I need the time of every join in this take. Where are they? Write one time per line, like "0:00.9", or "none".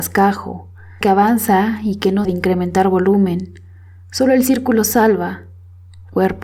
0:01.0
0:02.2